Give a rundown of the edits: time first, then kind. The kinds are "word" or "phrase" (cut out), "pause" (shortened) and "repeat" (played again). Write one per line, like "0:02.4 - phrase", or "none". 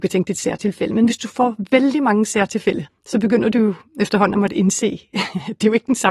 0:02.9 - pause

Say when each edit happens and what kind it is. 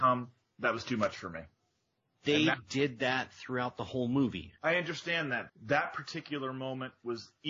0:04.6 - pause
0:05.5 - word

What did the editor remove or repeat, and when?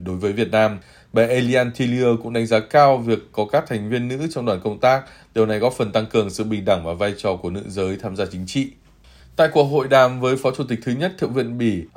none

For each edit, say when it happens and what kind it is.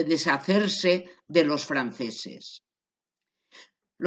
none

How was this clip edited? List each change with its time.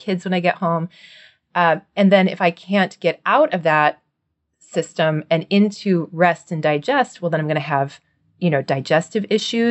none

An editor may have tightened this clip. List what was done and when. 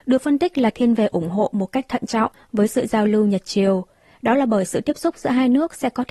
none

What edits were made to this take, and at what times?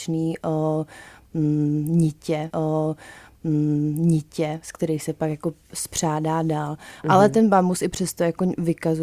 0:02.5 - repeat

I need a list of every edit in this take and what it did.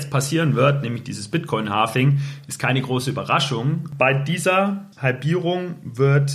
0:04.9 - pause

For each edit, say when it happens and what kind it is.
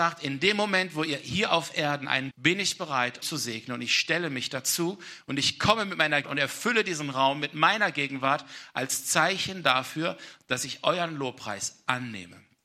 0:02.3 - phrase
0:03.2 - word
0:06.2 - word

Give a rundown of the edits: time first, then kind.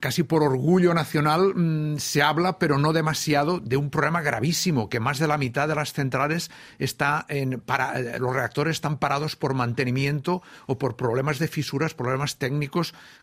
none

